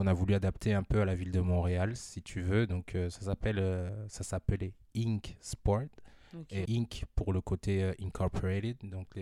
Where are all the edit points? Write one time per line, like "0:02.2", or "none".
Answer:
0:06.7